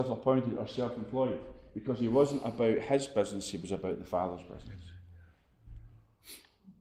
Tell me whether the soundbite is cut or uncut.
uncut